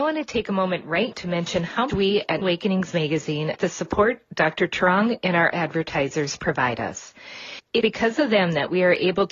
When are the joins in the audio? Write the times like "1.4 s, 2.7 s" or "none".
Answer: 1.1 s, 1.9 s, 2.4 s, 3.6 s, 5.5 s, 7.8 s